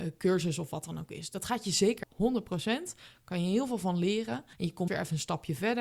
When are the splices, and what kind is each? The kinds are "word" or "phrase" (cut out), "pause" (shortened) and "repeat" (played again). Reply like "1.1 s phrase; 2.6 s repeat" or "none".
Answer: 2.0 s word; 4.5 s pause; 4.9 s word